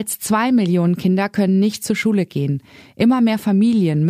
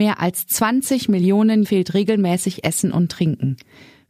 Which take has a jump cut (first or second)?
second